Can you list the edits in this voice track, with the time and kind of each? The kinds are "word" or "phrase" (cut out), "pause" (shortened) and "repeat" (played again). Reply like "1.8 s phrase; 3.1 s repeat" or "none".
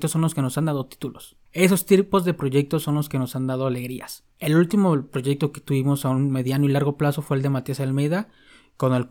1.5 s pause; 4.3 s pause